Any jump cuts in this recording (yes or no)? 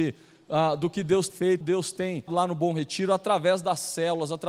yes